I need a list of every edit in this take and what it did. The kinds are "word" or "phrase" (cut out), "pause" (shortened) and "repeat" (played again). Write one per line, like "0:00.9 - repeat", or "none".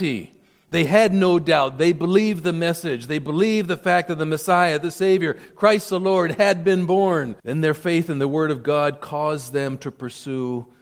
0:07.4 - pause